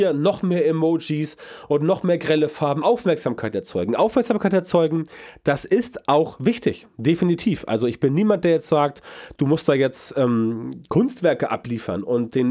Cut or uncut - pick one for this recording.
cut